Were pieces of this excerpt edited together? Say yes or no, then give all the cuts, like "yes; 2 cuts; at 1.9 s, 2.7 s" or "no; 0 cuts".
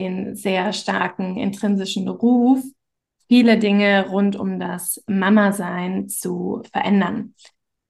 no; 0 cuts